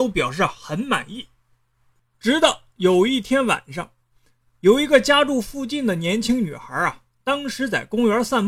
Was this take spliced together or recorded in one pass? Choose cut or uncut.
uncut